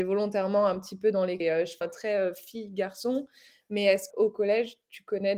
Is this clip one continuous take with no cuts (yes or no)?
no